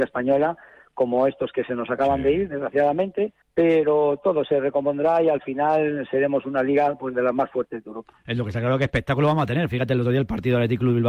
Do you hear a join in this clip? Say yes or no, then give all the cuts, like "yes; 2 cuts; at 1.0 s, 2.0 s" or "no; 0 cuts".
yes; 1 cut; at 3.4 s